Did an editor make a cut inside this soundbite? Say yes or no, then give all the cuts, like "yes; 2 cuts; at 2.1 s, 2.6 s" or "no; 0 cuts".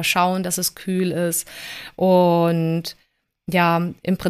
no; 0 cuts